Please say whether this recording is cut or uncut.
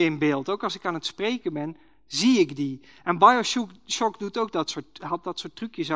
uncut